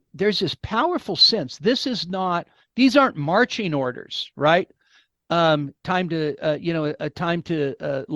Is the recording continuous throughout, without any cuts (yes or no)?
yes